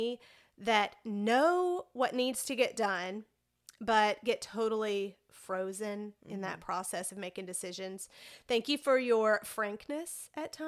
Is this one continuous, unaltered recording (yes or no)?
yes